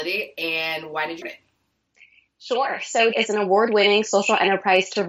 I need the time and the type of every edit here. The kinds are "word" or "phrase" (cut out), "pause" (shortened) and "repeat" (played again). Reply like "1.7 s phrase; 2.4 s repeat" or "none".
1.2 s word; 3.1 s word